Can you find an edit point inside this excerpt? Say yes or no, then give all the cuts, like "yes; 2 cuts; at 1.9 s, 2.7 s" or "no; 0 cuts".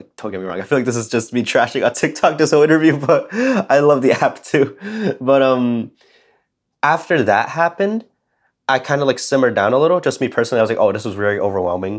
no; 0 cuts